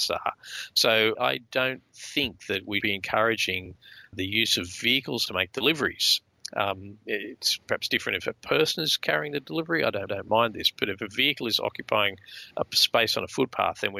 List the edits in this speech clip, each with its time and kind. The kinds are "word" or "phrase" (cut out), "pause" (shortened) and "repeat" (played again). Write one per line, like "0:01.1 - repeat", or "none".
0:01.2 - word
0:02.8 - word
0:04.1 - word
0:05.3 - phrase
0:10.1 - repeat
0:12.5 - pause